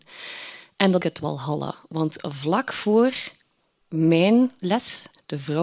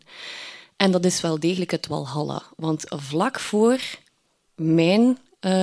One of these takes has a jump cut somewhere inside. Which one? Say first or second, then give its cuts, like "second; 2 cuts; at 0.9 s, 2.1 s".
first; 2 cuts; at 1.0 s, 4.6 s